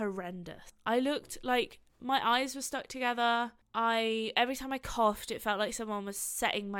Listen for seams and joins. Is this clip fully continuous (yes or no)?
yes